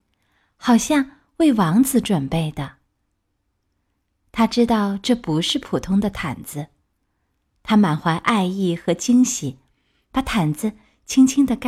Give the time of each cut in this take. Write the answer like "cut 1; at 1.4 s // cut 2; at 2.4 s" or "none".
none